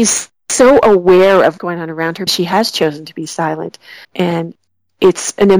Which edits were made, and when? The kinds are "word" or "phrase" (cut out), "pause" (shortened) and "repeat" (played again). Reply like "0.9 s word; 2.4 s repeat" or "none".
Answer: 1.6 s word; 2.3 s word; 4.0 s pause

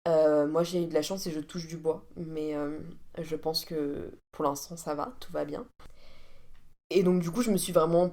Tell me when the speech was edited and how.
4.2 s pause

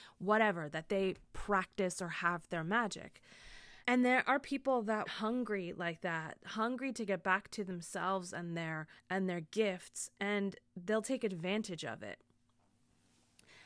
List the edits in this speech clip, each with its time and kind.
3.8 s pause; 5.1 s phrase; 9.0 s pause

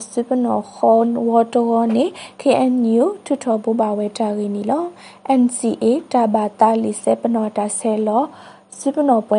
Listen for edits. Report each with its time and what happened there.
none

